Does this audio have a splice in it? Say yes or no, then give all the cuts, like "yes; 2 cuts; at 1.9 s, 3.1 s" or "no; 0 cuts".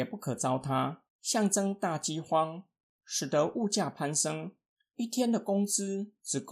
yes; 1 cut; at 1.1 s